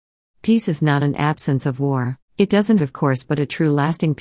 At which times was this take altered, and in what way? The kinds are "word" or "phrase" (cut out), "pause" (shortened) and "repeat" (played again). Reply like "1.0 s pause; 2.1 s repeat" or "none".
2.2 s pause; 2.8 s word